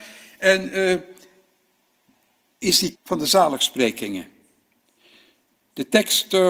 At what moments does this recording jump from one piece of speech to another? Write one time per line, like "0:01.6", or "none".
0:02.9